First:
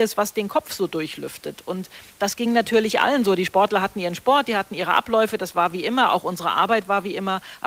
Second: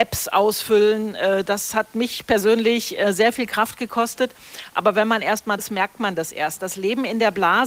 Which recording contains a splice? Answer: second; 1 cut; at 5.6 s

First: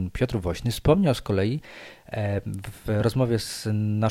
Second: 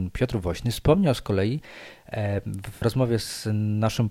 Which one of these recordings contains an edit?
second; 1 cut; at 2.8 s

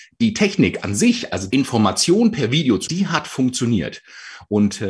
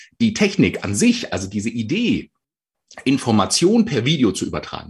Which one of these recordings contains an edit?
first; 2 cuts; at 1.5 s, 2.9 s

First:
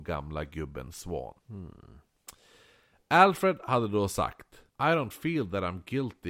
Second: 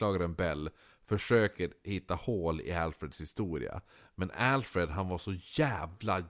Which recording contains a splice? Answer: first; 2 cuts; at 1.4 s, 4.7 s

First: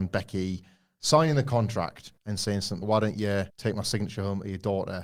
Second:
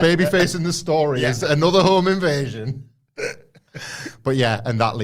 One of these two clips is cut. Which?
first; 3 cuts; at 2.2 s, 2.8 s, 3.5 s

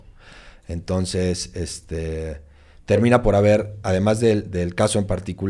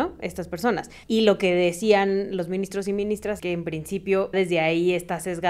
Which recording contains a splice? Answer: second; 3 cuts; at 1.0 s, 3.4 s, 4.3 s

